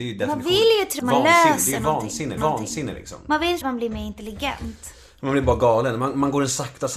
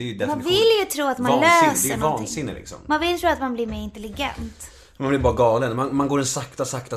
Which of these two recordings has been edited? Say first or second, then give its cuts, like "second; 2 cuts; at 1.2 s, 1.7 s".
first; 3 cuts; at 1.0 s, 2.4 s, 3.6 s